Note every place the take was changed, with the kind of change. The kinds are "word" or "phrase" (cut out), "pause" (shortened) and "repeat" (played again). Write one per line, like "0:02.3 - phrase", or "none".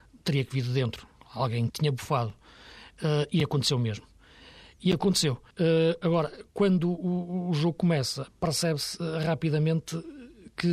0:01.7 - word
0:05.5 - pause